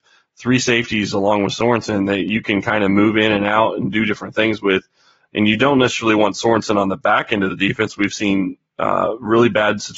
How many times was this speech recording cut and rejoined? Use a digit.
0